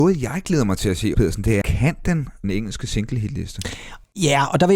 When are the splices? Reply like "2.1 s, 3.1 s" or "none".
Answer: 1.1 s, 1.6 s, 2.4 s